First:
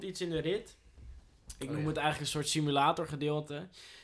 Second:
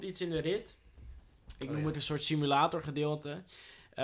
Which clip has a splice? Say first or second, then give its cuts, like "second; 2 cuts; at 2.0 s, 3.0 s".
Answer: second; 1 cut; at 1.9 s